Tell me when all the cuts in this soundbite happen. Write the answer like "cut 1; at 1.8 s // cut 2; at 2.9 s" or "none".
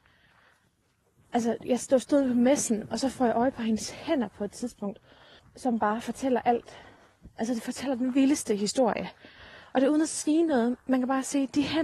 cut 1; at 5.4 s